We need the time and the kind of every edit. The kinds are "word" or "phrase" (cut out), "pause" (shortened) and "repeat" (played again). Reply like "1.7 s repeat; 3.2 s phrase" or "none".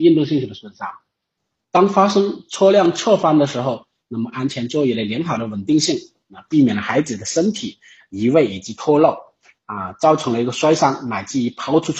none